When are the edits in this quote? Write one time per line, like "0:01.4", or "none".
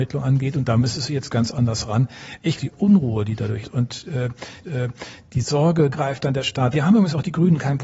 0:02.6
0:03.6
0:04.6
0:05.9
0:06.7